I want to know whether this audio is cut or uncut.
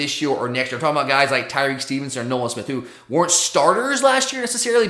uncut